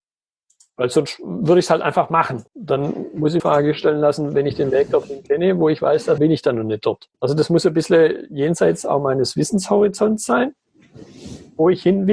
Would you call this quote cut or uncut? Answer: cut